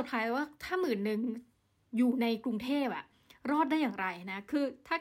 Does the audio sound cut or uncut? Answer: uncut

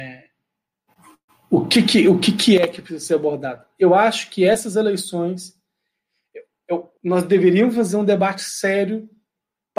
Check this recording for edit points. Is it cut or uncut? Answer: cut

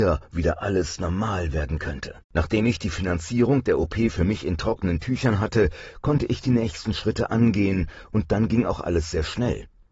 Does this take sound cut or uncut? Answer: cut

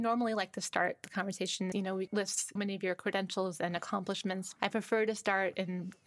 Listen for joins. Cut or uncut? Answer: cut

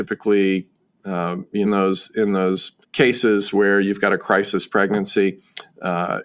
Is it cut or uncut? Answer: cut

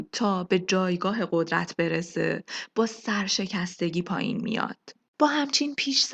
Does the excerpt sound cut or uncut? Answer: uncut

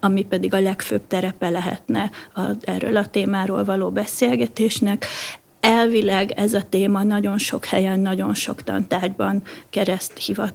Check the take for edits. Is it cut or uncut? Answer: uncut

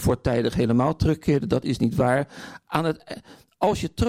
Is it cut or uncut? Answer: uncut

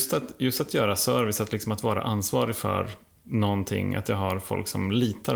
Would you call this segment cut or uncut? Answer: uncut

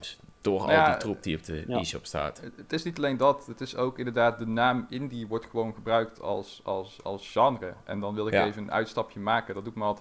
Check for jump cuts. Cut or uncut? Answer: uncut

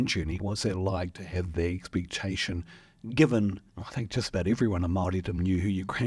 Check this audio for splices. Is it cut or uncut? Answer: cut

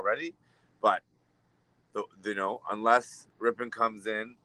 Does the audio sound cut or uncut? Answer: uncut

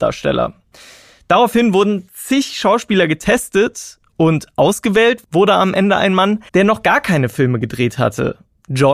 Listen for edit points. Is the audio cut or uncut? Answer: cut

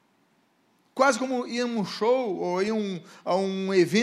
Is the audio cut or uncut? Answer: uncut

